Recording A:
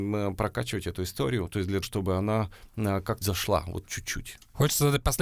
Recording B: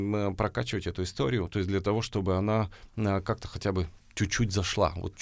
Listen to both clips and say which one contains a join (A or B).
A